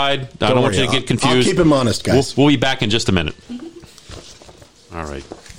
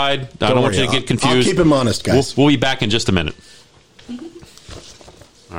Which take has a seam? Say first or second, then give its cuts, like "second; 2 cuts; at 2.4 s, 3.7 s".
first; 1 cut; at 3.4 s